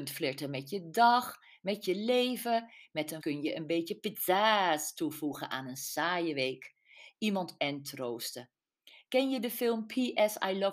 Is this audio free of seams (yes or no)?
no